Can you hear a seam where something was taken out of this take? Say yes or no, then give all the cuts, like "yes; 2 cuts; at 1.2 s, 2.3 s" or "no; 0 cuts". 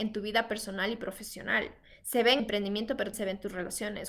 yes; 2 cuts; at 2.4 s, 3.1 s